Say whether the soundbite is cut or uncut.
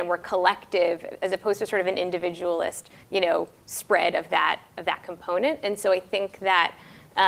uncut